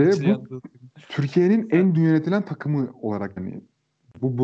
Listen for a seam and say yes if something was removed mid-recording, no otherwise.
yes